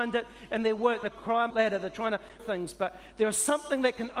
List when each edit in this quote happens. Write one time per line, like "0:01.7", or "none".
0:01.0
0:01.5
0:02.4